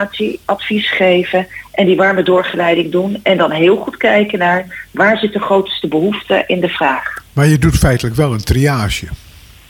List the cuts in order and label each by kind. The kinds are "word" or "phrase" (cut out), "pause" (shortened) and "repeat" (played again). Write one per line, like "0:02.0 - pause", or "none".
none

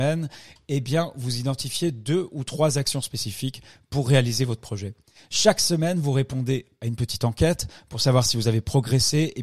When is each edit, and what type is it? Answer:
none

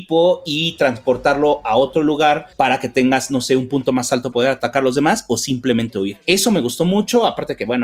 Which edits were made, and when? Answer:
0:04.3 - word

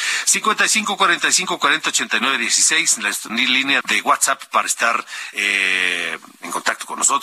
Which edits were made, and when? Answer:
0:03.3 - word
0:03.8 - word
0:05.3 - word

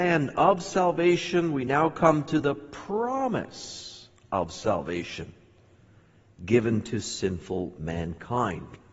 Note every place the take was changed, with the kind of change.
none

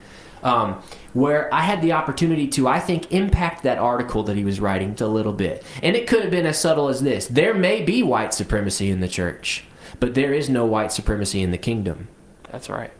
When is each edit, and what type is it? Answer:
0:05.0 - word

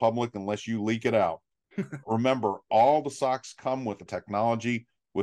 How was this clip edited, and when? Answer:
0:02.0 - word
0:04.1 - word

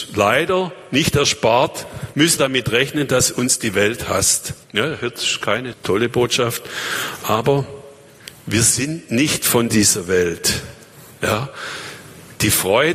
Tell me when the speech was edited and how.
0:02.4 - word
0:04.6 - pause
0:05.7 - word

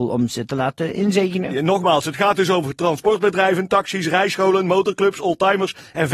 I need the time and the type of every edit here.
none

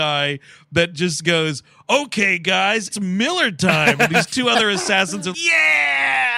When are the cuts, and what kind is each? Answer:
0:02.9 - word
0:05.3 - word

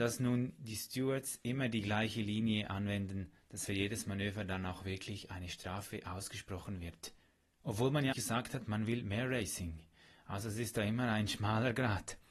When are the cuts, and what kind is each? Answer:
0:03.7 - phrase
0:08.1 - word

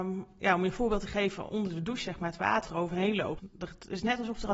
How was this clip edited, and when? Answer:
0:02.6 - word
0:03.4 - word

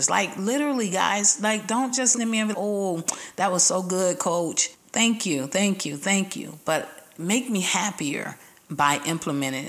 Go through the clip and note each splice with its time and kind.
0:02.2 - word
0:02.5 - word
0:04.7 - pause

